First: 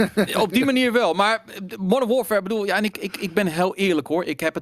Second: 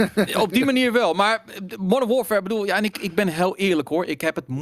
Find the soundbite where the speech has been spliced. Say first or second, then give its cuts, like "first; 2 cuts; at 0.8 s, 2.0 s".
second; 1 cut; at 2.9 s